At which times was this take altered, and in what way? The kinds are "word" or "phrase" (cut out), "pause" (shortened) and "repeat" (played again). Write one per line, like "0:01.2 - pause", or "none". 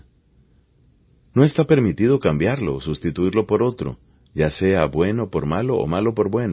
none